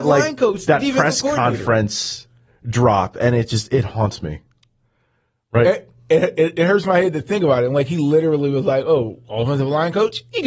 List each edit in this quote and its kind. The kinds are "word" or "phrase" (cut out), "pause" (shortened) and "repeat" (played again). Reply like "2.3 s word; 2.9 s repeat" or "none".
none